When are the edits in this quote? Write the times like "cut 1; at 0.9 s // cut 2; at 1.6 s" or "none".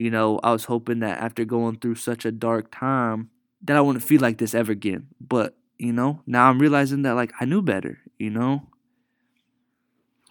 cut 1; at 3.4 s

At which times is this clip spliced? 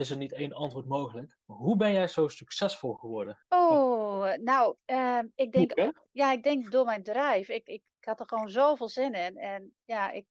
cut 1; at 1.4 s // cut 2; at 3.4 s // cut 3; at 4.8 s

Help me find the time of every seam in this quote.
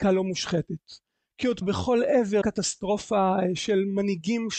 cut 1; at 1.6 s // cut 2; at 2.4 s

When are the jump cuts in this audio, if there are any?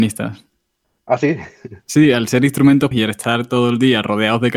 cut 1; at 2.9 s

